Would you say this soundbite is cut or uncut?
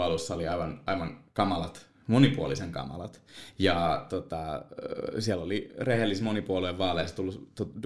uncut